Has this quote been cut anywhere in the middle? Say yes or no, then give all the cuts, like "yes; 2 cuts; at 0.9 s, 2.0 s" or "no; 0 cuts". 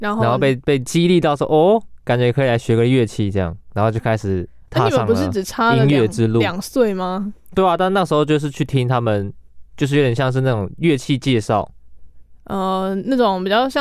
no; 0 cuts